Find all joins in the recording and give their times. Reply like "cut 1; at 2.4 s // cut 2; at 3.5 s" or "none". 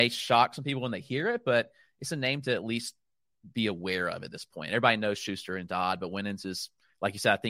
none